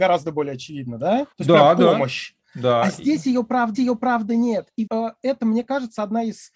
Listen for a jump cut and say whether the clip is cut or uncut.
cut